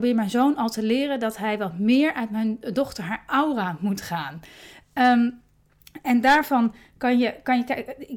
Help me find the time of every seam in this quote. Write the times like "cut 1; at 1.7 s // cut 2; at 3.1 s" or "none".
none